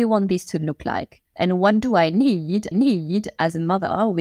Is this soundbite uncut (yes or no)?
no